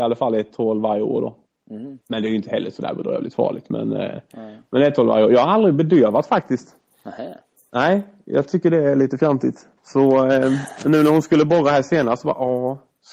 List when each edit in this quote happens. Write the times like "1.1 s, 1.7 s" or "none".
2.0 s, 9.8 s